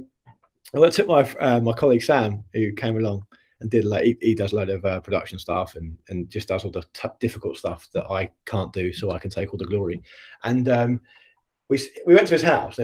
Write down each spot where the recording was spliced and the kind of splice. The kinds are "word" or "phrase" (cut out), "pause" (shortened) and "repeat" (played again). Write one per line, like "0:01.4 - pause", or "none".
none